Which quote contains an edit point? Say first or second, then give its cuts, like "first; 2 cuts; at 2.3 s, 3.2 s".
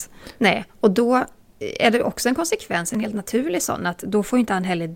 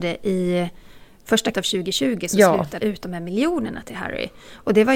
second; 2 cuts; at 1.5 s, 2.8 s